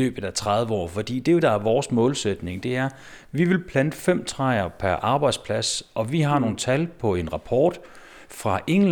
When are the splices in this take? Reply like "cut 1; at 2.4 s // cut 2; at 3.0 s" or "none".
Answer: cut 1; at 1.4 s